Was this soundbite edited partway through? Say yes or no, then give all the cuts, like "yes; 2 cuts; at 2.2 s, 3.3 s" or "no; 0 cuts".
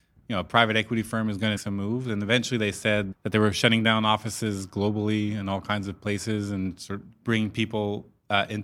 yes; 3 cuts; at 1.6 s, 3.1 s, 7.1 s